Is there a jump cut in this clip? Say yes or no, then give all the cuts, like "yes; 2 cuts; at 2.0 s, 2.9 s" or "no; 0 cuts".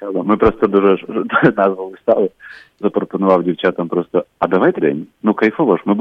yes; 4 cuts; at 1.5 s, 2.8 s, 4.3 s, 4.8 s